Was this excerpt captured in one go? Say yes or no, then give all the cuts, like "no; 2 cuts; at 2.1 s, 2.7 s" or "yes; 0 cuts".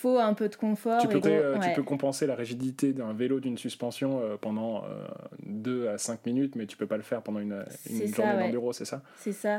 no; 1 cut; at 1.2 s